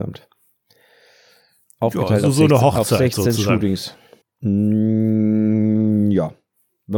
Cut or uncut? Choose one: cut